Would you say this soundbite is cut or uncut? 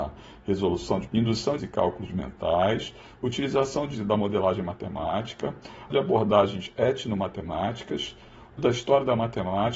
cut